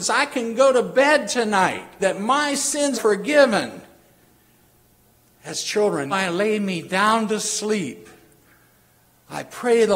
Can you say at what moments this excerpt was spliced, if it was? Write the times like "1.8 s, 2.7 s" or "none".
2.0 s, 2.9 s, 6.1 s